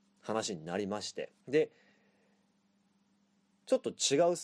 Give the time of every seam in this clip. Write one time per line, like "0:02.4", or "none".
0:01.4